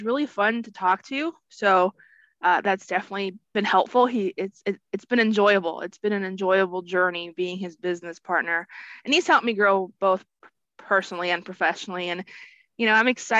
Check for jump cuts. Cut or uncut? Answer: uncut